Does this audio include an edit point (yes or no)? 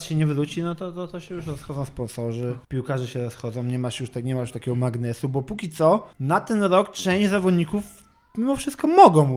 yes